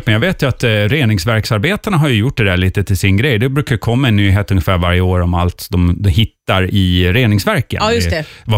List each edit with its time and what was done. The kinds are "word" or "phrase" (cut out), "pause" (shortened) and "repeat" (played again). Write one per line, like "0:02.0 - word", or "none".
none